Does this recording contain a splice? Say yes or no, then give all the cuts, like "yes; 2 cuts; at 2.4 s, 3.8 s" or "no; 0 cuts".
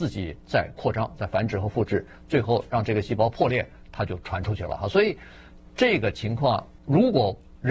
yes; 1 cut; at 6.8 s